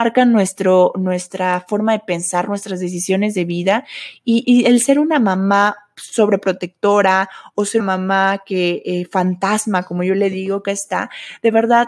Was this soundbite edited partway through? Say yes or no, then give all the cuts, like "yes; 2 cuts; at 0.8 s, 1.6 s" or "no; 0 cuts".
yes; 3 cuts; at 4.4 s, 7.8 s, 10.6 s